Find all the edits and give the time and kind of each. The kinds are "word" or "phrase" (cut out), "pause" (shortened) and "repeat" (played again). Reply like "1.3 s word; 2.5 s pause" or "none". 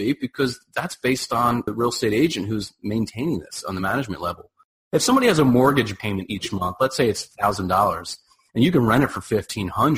none